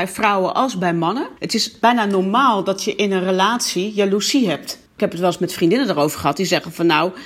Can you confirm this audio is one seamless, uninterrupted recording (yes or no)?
no